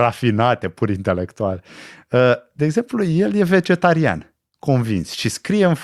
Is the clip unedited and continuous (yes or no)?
yes